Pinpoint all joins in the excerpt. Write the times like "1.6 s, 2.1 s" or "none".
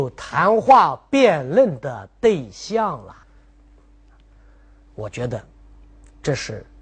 3.2 s